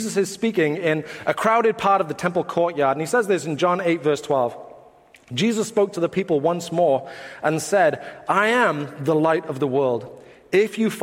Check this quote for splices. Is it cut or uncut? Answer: uncut